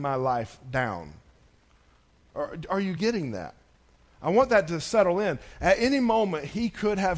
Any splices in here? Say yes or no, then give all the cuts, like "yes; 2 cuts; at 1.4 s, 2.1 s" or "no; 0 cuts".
no; 0 cuts